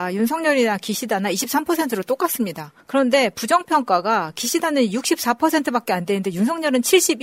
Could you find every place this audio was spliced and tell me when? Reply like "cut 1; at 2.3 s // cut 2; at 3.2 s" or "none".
cut 1; at 2.8 s